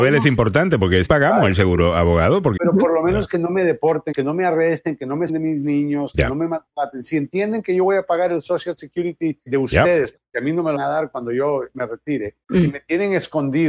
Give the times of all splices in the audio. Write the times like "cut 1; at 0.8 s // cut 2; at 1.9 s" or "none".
cut 1; at 1.0 s // cut 2; at 2.6 s // cut 3; at 4.1 s // cut 4; at 5.3 s // cut 5; at 9.5 s // cut 6; at 10.7 s // cut 7; at 12.4 s